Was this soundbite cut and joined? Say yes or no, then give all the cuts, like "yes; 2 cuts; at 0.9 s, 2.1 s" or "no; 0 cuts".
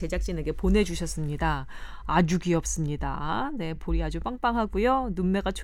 no; 0 cuts